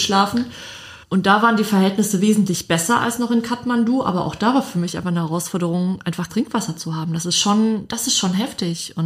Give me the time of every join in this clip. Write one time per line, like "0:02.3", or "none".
0:01.0
0:06.3

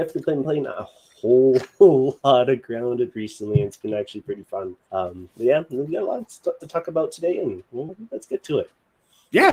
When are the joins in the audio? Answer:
0:04.8
0:06.6

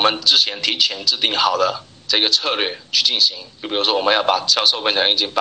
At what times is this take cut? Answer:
0:02.9
0:03.5

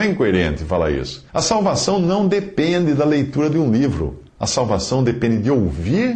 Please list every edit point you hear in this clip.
0:01.3
0:04.3

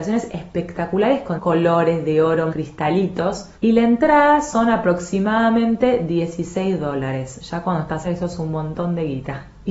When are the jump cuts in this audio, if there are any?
0:01.4
0:02.5
0:03.5
0:08.0

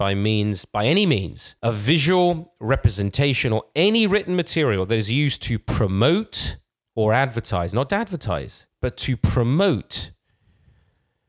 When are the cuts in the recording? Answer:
0:01.6
0:06.7
0:07.9

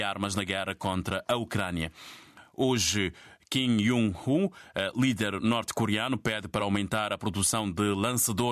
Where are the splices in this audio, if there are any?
none

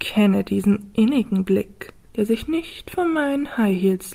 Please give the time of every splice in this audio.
0:02.0

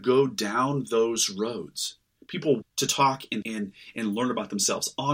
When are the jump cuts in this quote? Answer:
0:02.6
0:03.4

